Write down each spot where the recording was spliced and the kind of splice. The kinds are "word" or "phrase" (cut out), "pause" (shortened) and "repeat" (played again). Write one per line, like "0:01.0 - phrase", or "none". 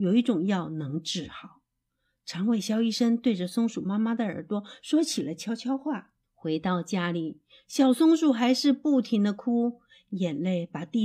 0:06.2 - pause